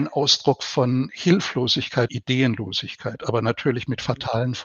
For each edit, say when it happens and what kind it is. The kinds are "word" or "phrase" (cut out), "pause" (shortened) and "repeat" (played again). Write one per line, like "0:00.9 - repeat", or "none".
0:02.1 - word